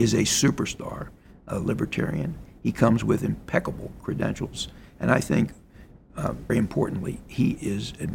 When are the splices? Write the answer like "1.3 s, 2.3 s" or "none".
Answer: 6.5 s